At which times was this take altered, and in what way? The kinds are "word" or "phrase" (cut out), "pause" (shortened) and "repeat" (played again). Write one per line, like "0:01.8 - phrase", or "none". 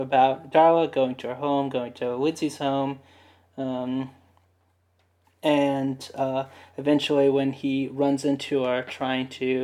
none